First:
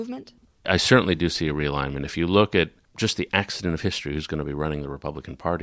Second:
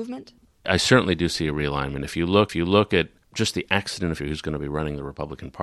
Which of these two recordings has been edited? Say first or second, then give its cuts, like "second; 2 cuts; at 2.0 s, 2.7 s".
second; 2 cuts; at 2.5 s, 4.2 s